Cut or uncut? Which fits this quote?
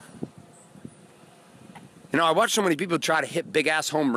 uncut